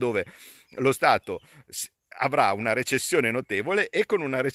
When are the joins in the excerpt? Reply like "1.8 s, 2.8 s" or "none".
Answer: none